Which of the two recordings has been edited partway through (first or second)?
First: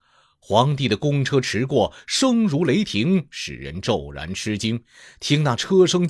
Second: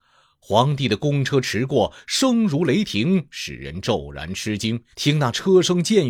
second